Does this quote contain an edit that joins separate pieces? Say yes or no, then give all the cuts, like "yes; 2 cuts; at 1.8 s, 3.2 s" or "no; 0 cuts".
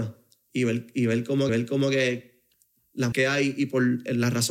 yes; 2 cuts; at 1.5 s, 3.1 s